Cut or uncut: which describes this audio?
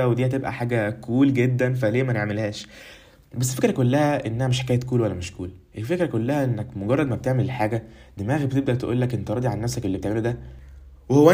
uncut